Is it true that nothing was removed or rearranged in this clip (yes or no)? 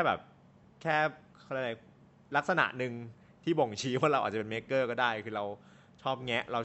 yes